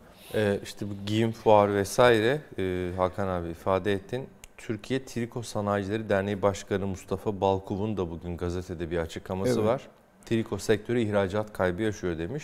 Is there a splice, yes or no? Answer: no